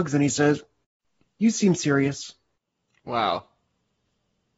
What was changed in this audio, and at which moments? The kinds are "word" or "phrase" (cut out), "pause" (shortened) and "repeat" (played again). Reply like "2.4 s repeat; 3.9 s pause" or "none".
none